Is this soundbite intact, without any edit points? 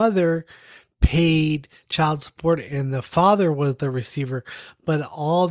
yes; 0 cuts

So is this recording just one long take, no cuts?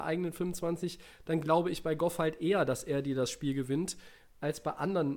yes; 0 cuts

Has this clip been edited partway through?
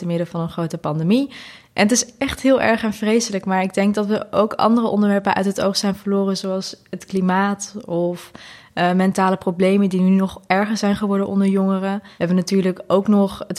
no; 0 cuts

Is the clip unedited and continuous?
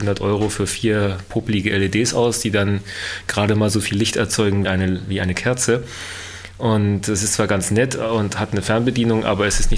no; 1 cut; at 4.6 s

